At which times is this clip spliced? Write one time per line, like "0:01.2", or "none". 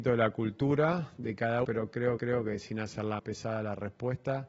0:01.6
0:02.2
0:03.2